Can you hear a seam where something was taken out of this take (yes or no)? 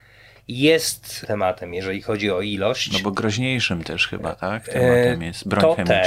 yes